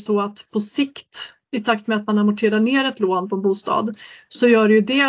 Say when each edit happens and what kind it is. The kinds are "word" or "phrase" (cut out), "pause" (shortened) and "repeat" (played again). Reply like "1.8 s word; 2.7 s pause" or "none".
none